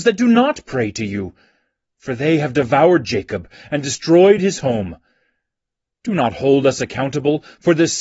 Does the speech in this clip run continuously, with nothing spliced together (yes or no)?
yes